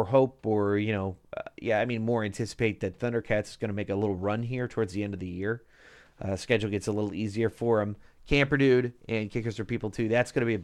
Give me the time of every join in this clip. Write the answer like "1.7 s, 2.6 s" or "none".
none